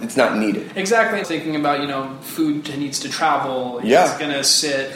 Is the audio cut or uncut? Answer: cut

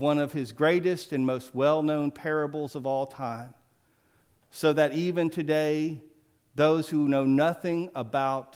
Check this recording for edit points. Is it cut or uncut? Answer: uncut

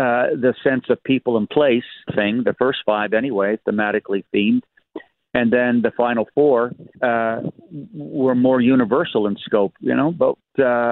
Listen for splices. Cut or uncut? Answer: cut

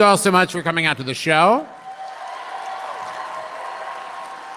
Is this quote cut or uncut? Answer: uncut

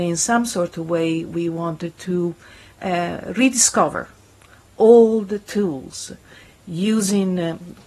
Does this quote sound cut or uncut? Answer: uncut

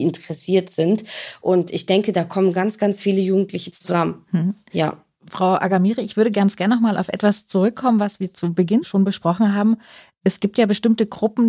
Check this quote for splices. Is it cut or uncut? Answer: uncut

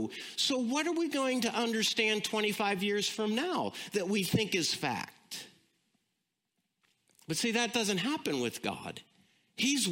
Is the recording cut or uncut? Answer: uncut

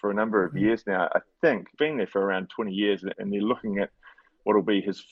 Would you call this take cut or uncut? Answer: cut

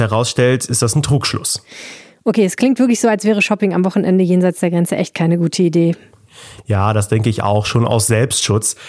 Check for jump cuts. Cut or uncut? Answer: uncut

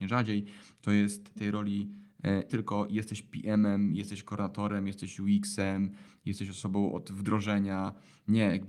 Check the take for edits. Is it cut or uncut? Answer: cut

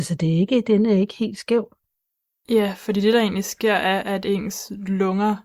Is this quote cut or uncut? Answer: uncut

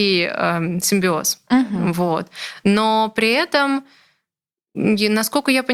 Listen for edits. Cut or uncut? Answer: uncut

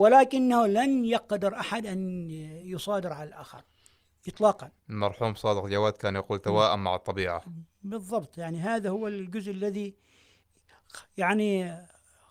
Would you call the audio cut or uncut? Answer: uncut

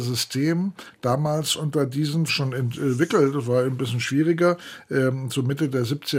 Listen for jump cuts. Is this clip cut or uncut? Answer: cut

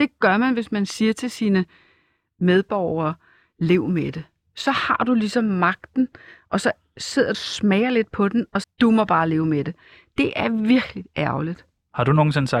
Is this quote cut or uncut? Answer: cut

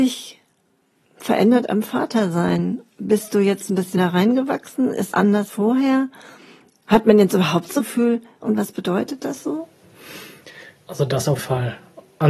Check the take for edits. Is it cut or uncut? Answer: cut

